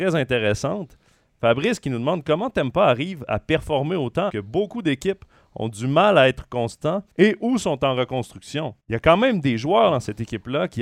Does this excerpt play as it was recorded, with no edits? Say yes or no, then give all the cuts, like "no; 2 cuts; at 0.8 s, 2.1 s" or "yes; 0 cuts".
no; 3 cuts; at 4.3 s, 7.1 s, 8.8 s